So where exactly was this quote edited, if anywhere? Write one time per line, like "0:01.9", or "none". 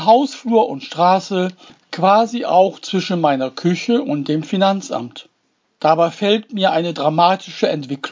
none